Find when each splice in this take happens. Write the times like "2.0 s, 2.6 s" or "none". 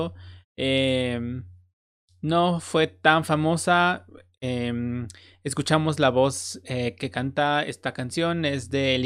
none